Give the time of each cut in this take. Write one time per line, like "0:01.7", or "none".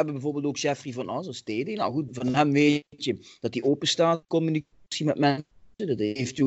0:04.2